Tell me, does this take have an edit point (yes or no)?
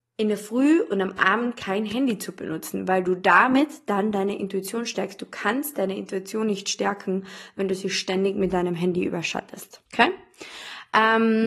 yes